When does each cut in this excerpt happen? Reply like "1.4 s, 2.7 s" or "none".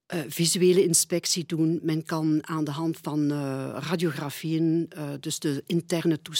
none